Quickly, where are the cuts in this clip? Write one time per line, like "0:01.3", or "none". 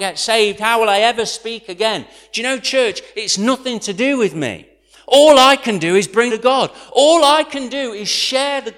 0:06.3